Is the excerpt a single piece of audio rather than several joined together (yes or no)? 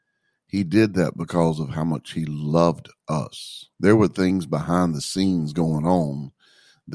no